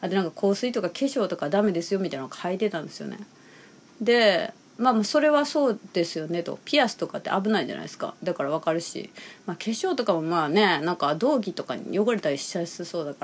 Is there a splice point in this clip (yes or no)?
no